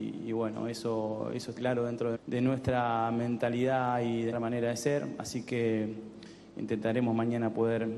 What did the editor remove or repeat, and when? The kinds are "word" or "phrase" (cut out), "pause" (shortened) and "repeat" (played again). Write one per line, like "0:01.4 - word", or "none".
0:01.6 - word
0:02.1 - word
0:04.3 - word